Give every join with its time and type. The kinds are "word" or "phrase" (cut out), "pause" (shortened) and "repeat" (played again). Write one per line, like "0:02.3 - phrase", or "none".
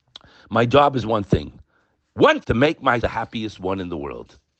0:02.4 - word
0:03.0 - word